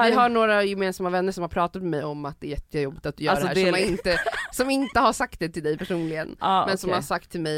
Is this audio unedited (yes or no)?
yes